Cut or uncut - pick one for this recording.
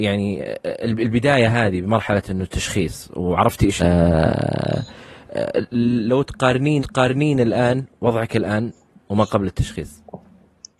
cut